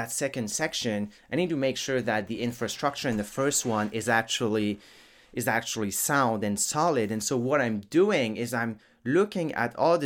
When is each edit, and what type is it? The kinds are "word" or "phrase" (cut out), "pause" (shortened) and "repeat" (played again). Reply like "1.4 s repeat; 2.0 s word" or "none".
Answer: none

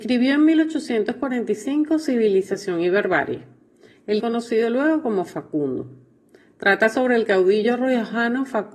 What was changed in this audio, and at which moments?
4.2 s phrase

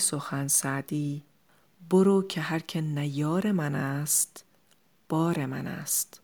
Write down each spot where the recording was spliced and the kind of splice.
none

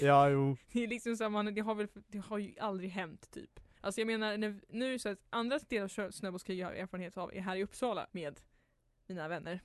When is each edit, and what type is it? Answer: 3.7 s pause; 8.1 s pause

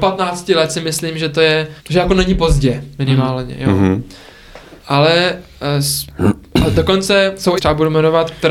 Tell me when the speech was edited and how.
1.8 s pause; 4.8 s pause; 7.6 s phrase

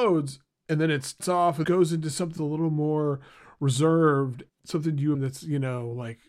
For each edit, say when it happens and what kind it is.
1.2 s word; 1.6 s word; 2.4 s word; 4.5 s word; 5.1 s word

